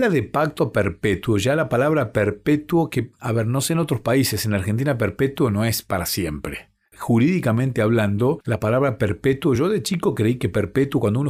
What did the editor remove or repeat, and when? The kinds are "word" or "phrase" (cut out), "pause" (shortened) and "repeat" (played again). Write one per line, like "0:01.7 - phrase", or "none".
none

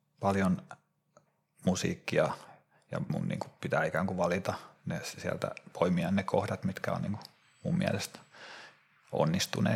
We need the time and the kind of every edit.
0:03.1 - word

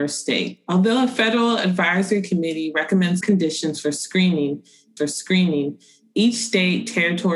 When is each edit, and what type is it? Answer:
0:03.2 - phrase
0:05.0 - repeat

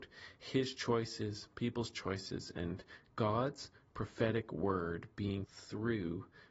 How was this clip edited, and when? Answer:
0:05.4 - word

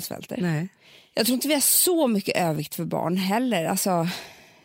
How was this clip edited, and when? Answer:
none

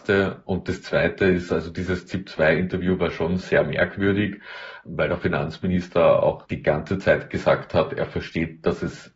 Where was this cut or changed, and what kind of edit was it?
none

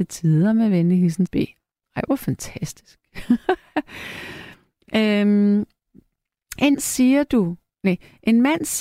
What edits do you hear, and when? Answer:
0:01.3 - word
0:06.7 - word

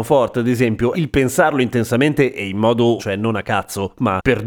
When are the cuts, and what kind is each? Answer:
0:00.9 - word
0:03.0 - word

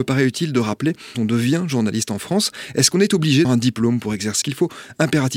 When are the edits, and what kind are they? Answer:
0:01.1 - word
0:03.4 - word
0:04.4 - word

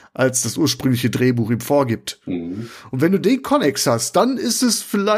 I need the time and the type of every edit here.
none

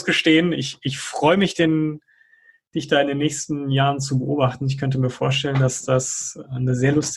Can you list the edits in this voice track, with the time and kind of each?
none

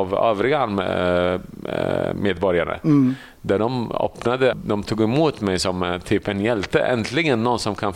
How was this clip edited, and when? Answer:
0:04.5 - word

